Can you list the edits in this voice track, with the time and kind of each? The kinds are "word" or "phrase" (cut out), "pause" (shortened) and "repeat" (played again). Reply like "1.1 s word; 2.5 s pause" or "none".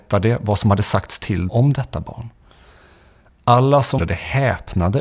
1.5 s word; 4.0 s word